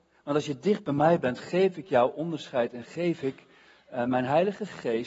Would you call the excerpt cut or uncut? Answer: uncut